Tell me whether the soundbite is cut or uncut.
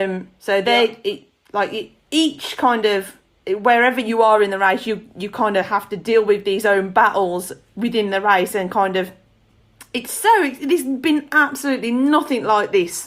uncut